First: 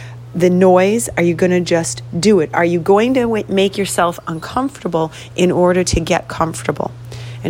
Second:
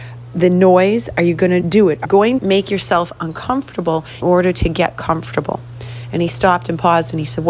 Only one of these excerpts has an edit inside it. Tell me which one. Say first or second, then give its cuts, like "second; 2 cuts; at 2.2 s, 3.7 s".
second; 4 cuts; at 1.6 s, 2.1 s, 2.4 s, 4.2 s